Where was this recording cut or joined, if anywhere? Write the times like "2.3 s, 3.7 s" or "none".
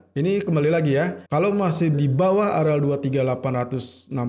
1.3 s, 1.9 s